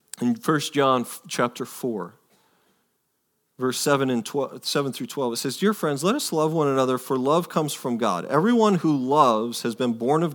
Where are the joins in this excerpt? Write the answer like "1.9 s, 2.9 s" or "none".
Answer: none

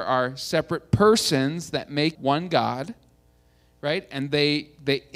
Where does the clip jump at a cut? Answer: 2.1 s

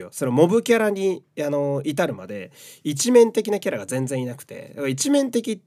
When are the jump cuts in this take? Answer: none

